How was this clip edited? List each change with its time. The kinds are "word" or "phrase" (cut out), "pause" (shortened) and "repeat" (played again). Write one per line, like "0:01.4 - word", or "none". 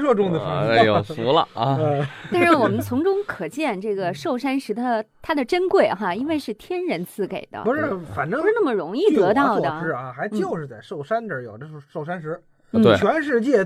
none